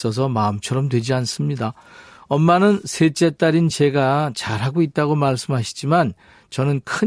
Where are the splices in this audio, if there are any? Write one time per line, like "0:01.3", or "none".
none